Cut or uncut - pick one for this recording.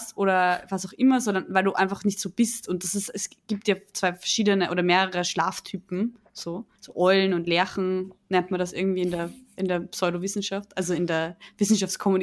cut